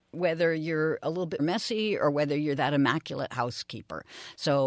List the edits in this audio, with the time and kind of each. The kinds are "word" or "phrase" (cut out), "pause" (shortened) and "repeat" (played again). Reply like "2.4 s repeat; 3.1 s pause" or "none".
1.4 s word